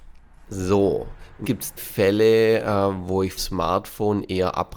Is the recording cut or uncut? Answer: cut